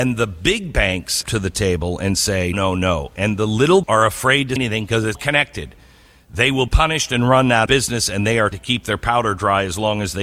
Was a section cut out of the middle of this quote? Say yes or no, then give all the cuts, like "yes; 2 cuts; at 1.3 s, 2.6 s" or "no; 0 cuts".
yes; 8 cuts; at 1.2 s, 2.5 s, 3.8 s, 4.6 s, 5.1 s, 6.7 s, 7.7 s, 8.5 s